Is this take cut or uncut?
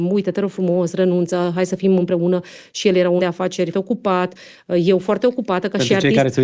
cut